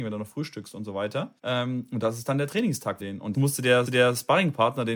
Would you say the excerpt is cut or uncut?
cut